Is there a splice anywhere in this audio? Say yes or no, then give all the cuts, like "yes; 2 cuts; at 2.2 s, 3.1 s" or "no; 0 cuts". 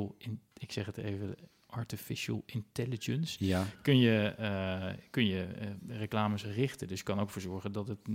no; 0 cuts